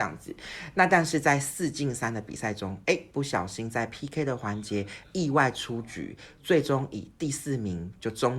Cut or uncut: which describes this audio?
uncut